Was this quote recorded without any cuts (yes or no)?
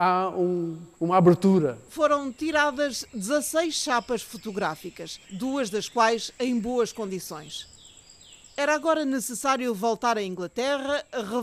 no